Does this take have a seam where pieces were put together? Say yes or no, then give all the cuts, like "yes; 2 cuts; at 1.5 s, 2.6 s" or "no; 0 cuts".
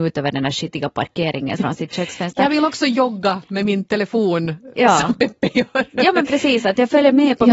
yes; 1 cut; at 1.6 s